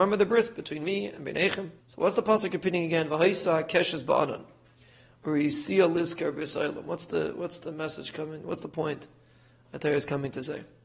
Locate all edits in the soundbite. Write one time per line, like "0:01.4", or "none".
0:01.8

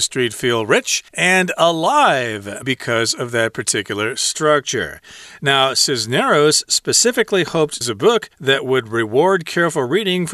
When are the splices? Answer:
0:01.1
0:02.6
0:07.8
0:08.3

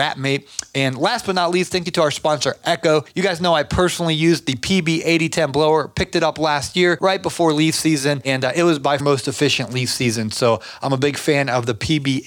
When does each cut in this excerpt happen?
0:09.0

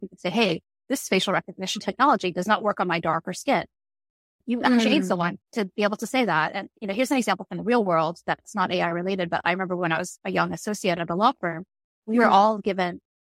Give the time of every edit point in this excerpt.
none

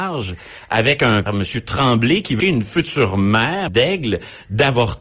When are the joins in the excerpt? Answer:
0:01.3
0:02.4
0:03.7

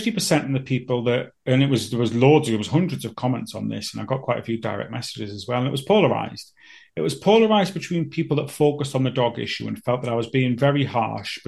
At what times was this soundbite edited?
none

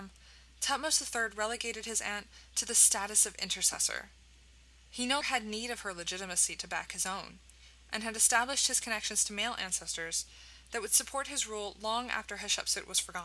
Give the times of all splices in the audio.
0:05.2

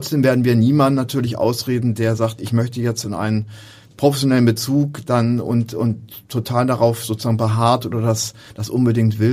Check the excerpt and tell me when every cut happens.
none

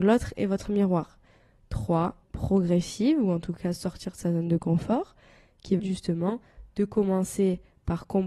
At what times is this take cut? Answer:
0:02.2
0:05.8

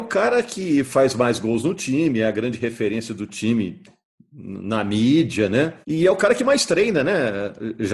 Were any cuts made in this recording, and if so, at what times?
0:05.8

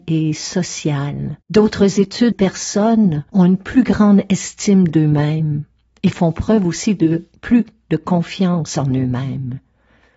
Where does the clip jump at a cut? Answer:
0:01.4
0:02.3
0:03.3

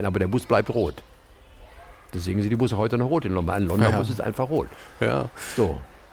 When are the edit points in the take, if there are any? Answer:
none

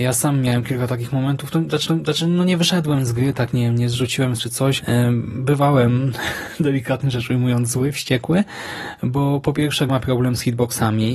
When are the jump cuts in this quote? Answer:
0:01.8
0:04.4
0:04.8
0:09.9

